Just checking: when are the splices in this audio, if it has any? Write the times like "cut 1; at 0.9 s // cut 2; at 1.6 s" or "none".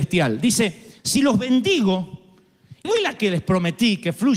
cut 1; at 1.0 s // cut 2; at 2.8 s // cut 3; at 3.2 s